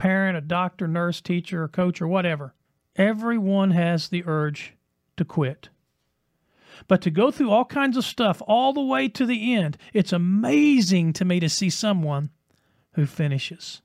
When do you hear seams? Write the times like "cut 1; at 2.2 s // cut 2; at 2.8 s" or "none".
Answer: cut 1; at 2.6 s